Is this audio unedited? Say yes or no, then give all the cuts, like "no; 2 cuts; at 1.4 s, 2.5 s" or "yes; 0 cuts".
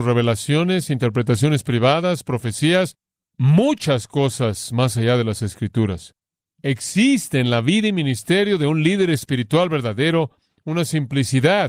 yes; 0 cuts